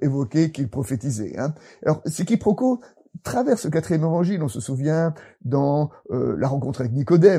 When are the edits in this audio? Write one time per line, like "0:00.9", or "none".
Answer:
none

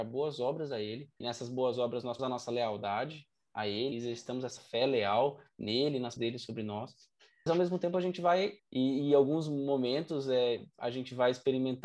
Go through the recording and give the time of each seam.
0:01.2
0:02.2
0:03.9
0:04.6
0:06.2
0:07.5
0:08.6

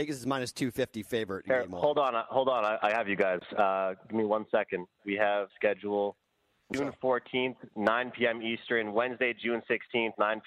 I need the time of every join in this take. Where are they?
0:05.5
0:06.7

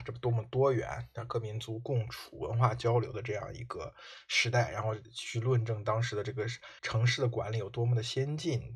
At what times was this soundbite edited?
0:06.8

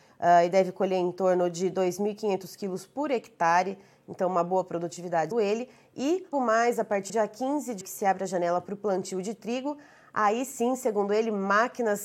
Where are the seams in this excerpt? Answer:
0:05.3
0:06.3
0:07.1
0:07.8

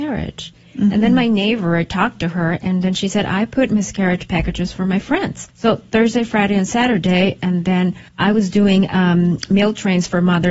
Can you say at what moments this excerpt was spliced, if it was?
0:05.5
0:08.1

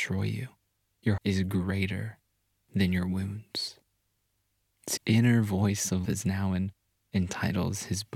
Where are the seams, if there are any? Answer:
0:01.2
0:05.0
0:06.1

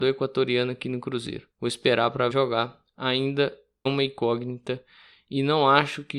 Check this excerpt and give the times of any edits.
0:01.5
0:02.3
0:03.9

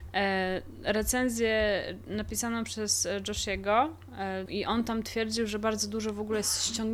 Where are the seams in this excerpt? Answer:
0:04.5

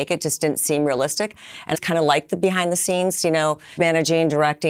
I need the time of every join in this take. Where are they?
0:01.7
0:03.8

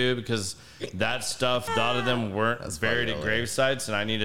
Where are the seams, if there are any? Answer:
0:01.7

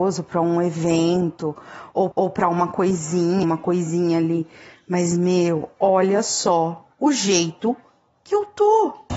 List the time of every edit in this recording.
0:02.1
0:03.4
0:06.9

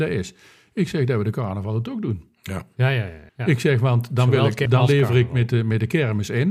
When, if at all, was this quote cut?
0:03.3
0:04.7

